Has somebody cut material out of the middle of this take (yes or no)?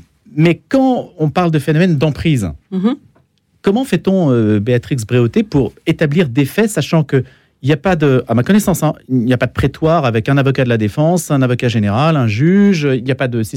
no